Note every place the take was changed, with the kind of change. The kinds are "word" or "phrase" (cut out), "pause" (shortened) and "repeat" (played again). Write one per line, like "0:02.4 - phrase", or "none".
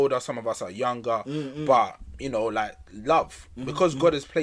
none